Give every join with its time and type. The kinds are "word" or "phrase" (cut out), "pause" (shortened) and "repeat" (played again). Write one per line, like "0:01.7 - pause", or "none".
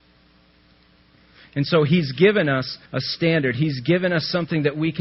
0:02.9 - pause